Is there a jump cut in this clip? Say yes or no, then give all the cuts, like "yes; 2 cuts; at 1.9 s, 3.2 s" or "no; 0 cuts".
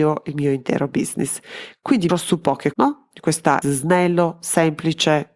yes; 3 cuts; at 2.1 s, 2.7 s, 3.6 s